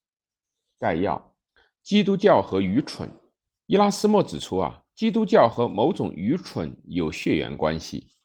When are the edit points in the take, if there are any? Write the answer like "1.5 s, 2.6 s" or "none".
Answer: 1.5 s, 3.4 s